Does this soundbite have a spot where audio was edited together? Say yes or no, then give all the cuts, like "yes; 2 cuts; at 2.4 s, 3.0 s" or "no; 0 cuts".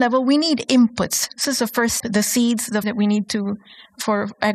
yes; 3 cuts; at 1.4 s, 2.0 s, 2.8 s